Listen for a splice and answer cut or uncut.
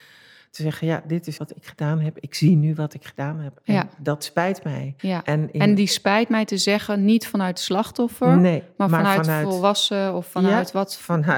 cut